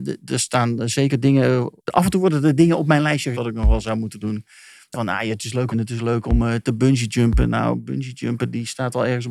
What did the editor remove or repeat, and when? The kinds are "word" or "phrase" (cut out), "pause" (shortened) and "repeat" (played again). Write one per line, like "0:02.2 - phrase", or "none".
0:01.8 - pause
0:03.3 - word
0:04.9 - phrase
0:05.7 - phrase